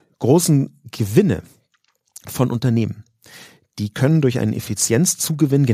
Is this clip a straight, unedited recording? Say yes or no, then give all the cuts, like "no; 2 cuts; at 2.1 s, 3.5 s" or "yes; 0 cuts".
yes; 0 cuts